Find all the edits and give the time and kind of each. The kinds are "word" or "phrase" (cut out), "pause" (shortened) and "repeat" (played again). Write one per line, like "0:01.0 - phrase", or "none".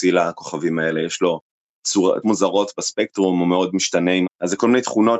0:02.2 - word
0:04.2 - word